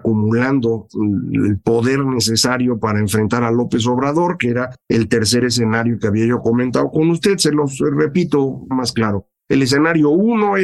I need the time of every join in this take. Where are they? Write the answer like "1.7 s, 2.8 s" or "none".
4.8 s, 8.7 s, 9.4 s